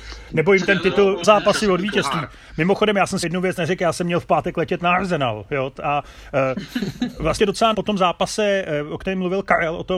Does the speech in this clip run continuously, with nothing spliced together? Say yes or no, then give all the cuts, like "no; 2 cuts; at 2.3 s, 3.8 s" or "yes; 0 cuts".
no; 5 cuts; at 1.2 s, 3.2 s, 3.6 s, 7.4 s, 7.7 s